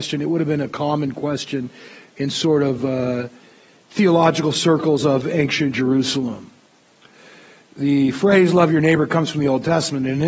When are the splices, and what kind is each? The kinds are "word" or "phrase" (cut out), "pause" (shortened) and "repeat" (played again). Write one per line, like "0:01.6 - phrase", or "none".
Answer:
none

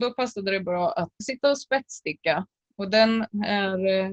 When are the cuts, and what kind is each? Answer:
0:01.2 - word

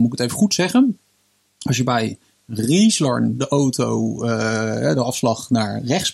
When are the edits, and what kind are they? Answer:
none

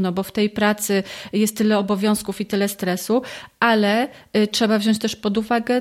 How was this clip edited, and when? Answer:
none

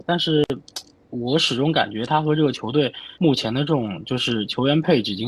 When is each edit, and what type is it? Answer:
0:03.1 - pause

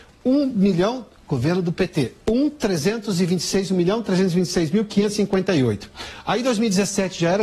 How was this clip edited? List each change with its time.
none

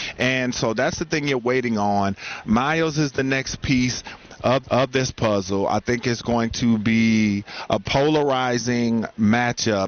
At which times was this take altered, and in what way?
0:04.6 - repeat

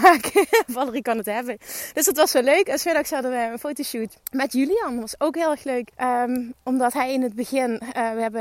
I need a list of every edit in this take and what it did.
0:04.2 - pause
0:05.9 - pause

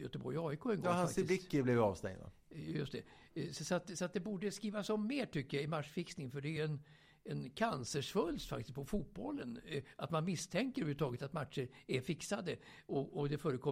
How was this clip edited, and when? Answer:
none

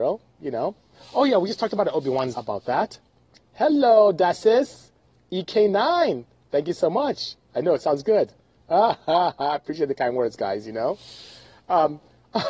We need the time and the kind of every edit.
0:00.9 - pause
0:02.3 - word

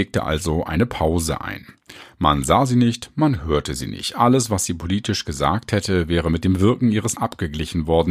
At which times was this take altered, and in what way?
0:07.1 - word

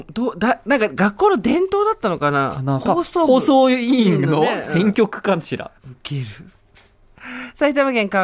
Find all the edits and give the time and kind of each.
0:05.8 - pause

